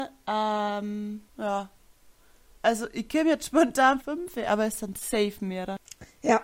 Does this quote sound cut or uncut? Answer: cut